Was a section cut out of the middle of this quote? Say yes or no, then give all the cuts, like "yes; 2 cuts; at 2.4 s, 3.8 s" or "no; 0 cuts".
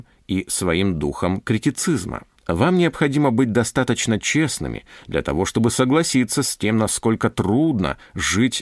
yes; 1 cut; at 2.4 s